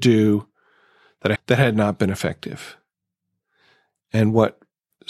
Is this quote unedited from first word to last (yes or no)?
no